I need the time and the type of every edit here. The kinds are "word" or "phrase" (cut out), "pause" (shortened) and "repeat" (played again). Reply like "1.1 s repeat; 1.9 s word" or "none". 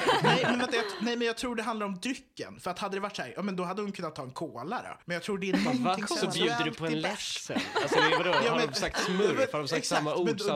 5.0 s pause